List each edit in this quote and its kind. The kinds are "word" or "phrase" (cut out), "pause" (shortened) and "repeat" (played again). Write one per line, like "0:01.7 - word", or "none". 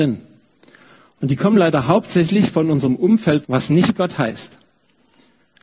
0:03.4 - word

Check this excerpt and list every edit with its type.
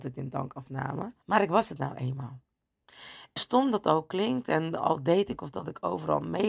0:01.2 - pause
0:03.4 - word

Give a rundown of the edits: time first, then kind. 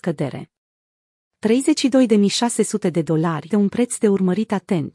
0:03.5 - word

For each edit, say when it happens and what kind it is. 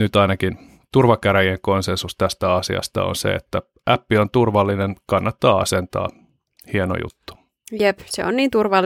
none

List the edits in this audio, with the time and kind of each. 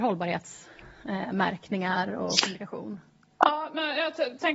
none

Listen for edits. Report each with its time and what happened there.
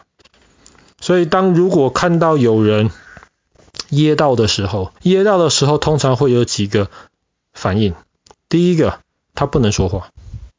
0:05.0 - pause

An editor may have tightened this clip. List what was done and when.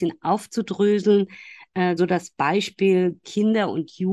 0:02.0 - word

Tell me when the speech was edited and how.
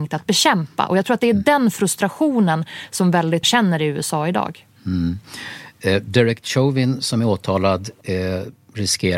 0:03.4 - word

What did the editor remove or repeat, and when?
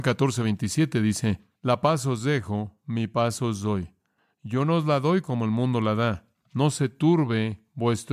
none

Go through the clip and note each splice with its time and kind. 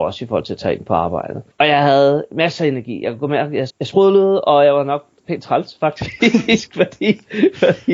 0:01.5 - pause
0:03.7 - word

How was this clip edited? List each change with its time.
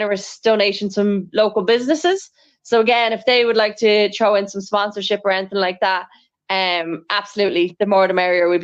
none

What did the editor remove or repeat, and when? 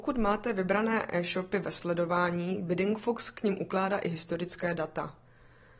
none

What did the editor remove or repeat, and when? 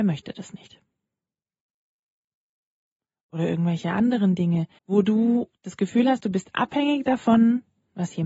0:04.8 - pause
0:05.6 - pause

